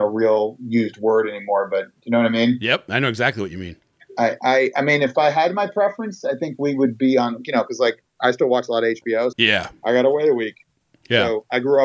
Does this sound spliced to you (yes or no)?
yes